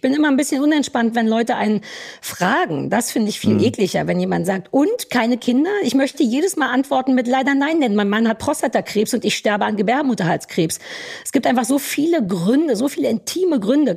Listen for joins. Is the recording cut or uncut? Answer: uncut